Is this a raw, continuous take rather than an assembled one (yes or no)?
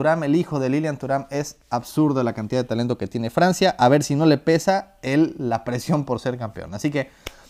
yes